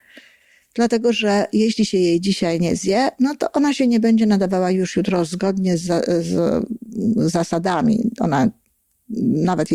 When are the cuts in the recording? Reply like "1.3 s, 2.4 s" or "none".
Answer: none